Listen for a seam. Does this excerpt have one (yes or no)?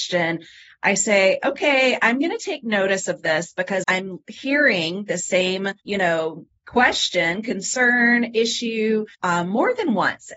yes